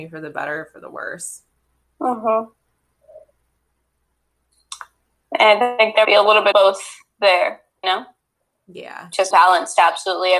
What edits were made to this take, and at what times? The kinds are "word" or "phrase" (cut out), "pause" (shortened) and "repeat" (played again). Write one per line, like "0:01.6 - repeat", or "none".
0:06.0 - word
0:06.5 - word
0:07.8 - word
0:09.3 - word